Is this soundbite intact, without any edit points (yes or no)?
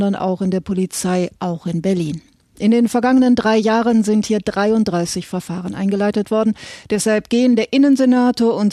yes